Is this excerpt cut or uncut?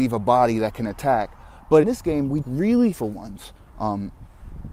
cut